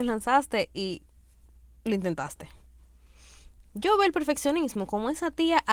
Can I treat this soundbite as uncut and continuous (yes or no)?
yes